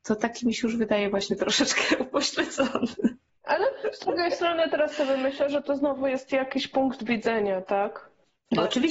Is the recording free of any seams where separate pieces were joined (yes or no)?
yes